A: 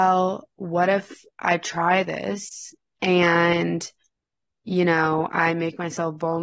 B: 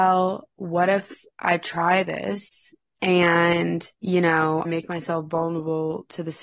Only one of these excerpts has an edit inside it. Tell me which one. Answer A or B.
B